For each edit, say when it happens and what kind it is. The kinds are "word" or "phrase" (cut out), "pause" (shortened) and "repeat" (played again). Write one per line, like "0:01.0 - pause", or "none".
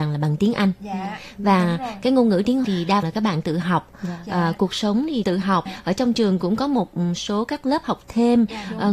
0:02.6 - word
0:03.0 - word
0:05.2 - word
0:05.7 - word